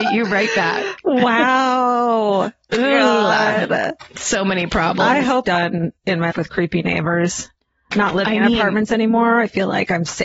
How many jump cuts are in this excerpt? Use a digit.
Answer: 3